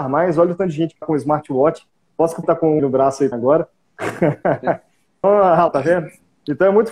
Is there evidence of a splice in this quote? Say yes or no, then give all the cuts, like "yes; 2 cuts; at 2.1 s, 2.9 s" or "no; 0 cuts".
yes; 6 cuts; at 1.0 s, 2.4 s, 2.8 s, 3.3 s, 5.2 s, 5.7 s